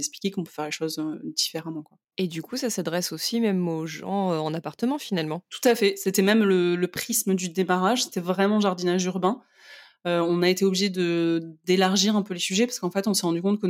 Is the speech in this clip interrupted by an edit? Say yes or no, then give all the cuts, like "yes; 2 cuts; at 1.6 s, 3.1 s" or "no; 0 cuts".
yes; 1 cut; at 2.1 s